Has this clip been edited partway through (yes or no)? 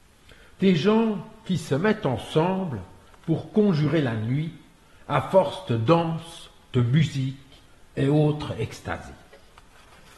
no